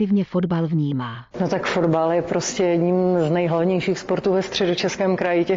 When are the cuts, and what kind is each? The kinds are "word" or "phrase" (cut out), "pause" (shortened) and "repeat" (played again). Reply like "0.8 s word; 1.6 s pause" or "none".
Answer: 1.3 s pause